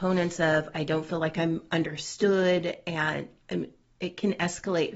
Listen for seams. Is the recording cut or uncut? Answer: uncut